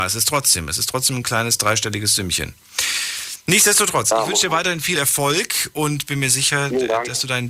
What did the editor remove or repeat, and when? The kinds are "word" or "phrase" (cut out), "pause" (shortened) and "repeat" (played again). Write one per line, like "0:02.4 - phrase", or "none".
none